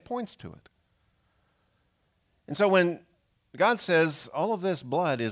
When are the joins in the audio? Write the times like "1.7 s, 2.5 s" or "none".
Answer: none